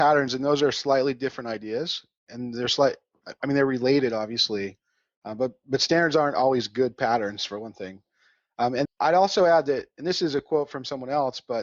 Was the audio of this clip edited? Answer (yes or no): yes